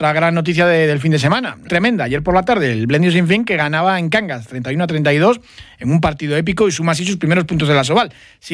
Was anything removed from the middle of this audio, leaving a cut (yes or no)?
yes